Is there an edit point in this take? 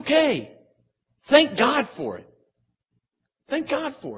no; 0 cuts

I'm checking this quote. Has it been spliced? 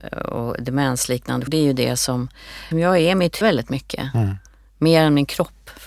yes; 3 cuts; at 1.5 s, 2.7 s, 3.4 s

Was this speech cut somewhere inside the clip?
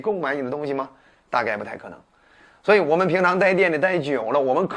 no; 0 cuts

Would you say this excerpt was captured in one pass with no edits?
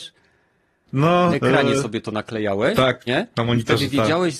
no; 2 cuts; at 1.3 s, 3.1 s

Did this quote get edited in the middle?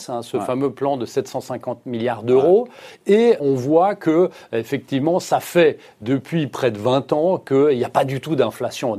yes; 1 cut; at 3.4 s

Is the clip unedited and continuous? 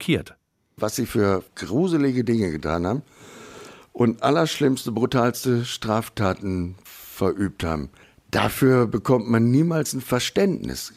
yes; 0 cuts

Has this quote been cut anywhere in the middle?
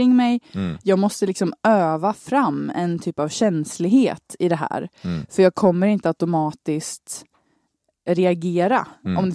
no; 0 cuts

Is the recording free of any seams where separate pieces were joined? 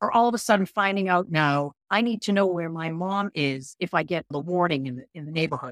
no; 1 cut; at 1.8 s

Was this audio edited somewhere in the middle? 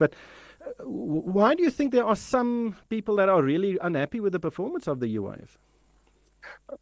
no; 0 cuts

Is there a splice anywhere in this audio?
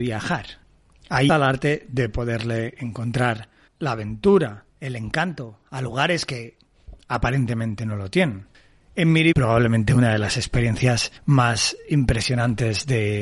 yes; 5 cuts; at 1.3 s, 3.7 s, 4.7 s, 9.3 s, 11.2 s

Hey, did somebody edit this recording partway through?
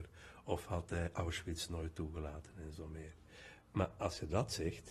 no; 0 cuts

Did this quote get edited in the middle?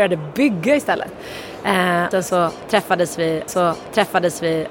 yes; 2 cuts; at 2.1 s, 3.5 s

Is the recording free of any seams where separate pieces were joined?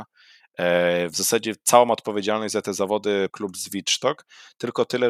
no; 1 cut; at 3.3 s

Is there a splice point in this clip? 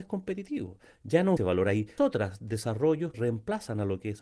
yes; 3 cuts; at 1.4 s, 2.0 s, 3.1 s

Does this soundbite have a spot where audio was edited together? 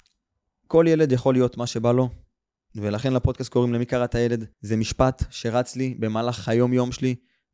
yes; 1 cut; at 4.5 s

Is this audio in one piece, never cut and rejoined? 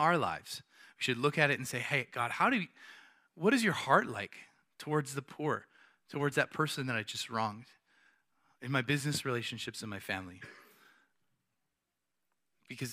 yes; 0 cuts

